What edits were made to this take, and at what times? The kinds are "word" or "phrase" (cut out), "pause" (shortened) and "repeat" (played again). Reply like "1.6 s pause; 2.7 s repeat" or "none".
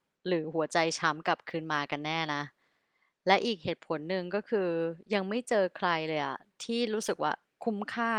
none